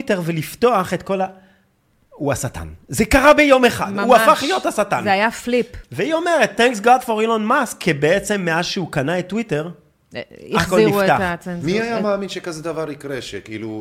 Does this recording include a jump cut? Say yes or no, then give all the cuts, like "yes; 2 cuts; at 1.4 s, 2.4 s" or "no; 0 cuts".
no; 0 cuts